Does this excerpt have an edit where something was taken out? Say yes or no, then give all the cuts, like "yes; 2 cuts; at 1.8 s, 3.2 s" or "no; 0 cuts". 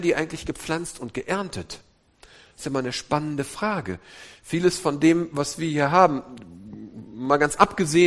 no; 0 cuts